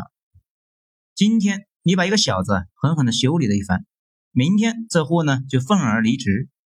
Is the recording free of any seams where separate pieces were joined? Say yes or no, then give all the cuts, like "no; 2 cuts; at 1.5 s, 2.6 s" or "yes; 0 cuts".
yes; 0 cuts